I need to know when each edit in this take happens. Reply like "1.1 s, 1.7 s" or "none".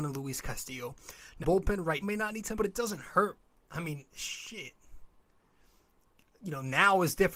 1.4 s, 2.0 s, 2.5 s